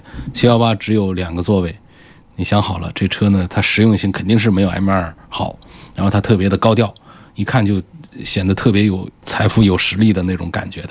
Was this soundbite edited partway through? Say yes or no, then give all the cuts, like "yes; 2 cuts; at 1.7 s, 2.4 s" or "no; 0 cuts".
no; 0 cuts